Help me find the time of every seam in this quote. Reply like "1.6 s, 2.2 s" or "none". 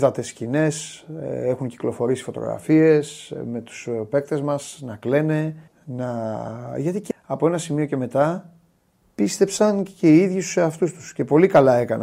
5.7 s, 7.1 s